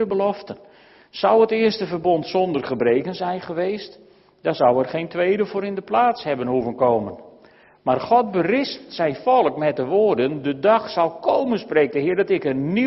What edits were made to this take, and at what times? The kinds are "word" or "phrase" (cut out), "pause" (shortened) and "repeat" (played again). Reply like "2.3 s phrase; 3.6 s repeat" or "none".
none